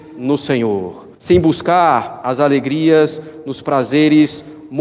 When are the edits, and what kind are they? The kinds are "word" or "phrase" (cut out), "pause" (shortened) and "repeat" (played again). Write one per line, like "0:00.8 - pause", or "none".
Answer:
0:01.1 - pause